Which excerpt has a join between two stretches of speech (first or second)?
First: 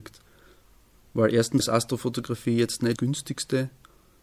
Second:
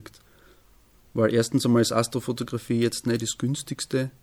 first